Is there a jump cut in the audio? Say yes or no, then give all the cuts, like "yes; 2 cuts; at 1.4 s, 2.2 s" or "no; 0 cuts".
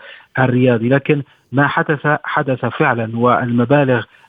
no; 0 cuts